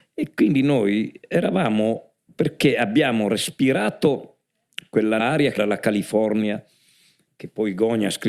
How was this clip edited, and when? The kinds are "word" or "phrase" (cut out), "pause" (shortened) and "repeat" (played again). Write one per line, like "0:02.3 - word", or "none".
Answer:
0:02.2 - pause
0:05.2 - word
0:05.6 - word